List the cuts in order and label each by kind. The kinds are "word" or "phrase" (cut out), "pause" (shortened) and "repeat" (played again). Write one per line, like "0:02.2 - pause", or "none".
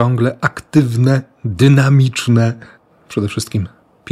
none